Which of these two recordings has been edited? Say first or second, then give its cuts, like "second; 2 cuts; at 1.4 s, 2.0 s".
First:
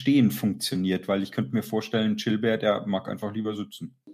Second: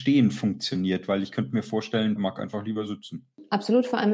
second; 1 cut; at 2.2 s